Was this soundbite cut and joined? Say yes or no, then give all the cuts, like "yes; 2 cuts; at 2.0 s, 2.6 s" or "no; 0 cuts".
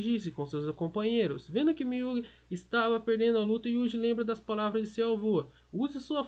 no; 0 cuts